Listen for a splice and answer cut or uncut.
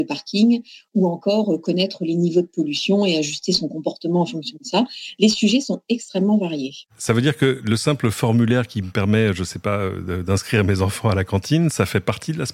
cut